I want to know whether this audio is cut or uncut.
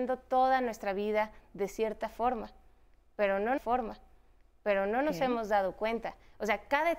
cut